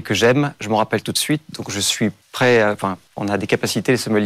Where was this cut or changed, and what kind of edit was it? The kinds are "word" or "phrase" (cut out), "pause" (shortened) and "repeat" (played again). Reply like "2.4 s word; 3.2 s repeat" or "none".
2.2 s pause; 3.1 s pause